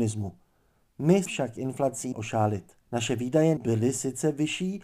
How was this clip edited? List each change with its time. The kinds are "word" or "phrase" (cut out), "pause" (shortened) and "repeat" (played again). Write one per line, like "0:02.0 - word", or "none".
0:01.3 - word
0:02.1 - word
0:02.8 - pause
0:03.6 - phrase